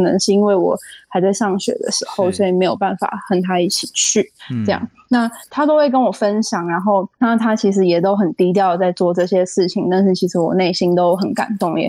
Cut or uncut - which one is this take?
cut